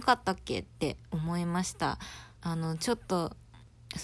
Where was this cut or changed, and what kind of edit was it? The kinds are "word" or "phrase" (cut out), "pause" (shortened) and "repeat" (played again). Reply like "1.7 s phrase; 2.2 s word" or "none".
2.3 s pause